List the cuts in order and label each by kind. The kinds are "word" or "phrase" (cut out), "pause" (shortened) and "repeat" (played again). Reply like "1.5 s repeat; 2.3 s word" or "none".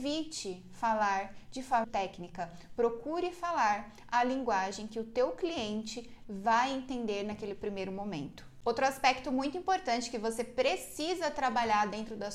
1.8 s word